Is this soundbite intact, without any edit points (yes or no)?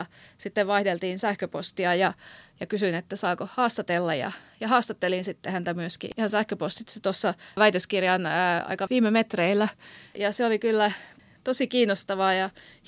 yes